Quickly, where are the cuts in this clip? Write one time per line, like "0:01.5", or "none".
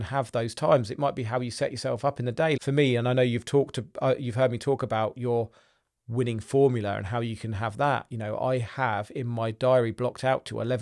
0:02.6